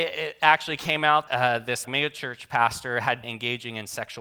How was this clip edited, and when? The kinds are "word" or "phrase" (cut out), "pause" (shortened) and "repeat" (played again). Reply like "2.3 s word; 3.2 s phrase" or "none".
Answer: 1.3 s word; 1.8 s word; 3.2 s word